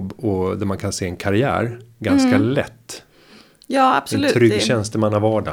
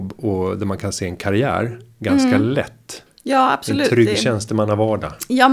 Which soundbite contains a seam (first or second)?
second